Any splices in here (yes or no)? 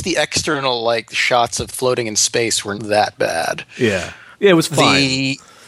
yes